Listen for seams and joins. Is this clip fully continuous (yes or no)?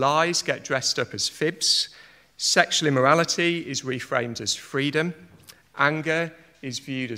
yes